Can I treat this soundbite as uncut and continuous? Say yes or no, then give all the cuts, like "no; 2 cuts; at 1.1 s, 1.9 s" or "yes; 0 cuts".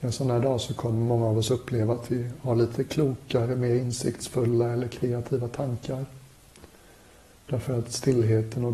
yes; 0 cuts